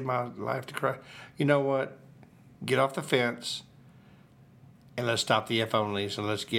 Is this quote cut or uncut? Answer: uncut